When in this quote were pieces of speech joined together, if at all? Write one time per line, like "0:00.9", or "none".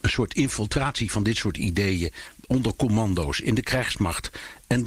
none